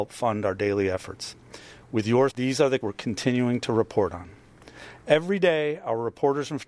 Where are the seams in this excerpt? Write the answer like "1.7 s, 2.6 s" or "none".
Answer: 2.3 s, 2.8 s